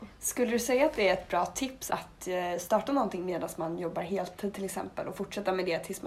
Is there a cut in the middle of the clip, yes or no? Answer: yes